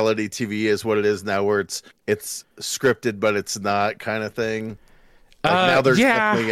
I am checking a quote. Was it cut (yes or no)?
no